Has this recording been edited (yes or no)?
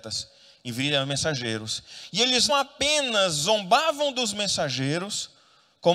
yes